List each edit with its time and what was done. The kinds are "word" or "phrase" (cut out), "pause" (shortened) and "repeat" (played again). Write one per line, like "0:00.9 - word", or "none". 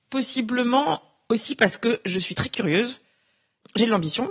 none